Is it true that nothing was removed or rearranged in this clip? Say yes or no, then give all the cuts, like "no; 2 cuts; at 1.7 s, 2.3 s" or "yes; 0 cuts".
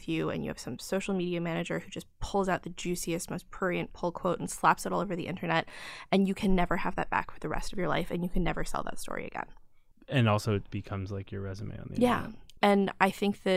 yes; 0 cuts